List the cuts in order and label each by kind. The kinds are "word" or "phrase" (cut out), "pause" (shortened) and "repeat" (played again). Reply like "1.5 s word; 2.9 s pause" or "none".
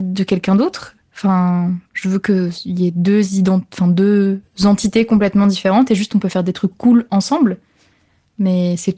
1.1 s pause